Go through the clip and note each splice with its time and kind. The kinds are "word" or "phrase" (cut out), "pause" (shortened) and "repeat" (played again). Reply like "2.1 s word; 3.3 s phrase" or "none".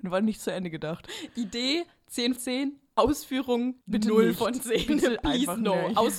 2.4 s word; 3.8 s pause